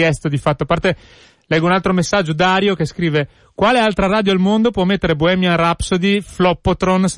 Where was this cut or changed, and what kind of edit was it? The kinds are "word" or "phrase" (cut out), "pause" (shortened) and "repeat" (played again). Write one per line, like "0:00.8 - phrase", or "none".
none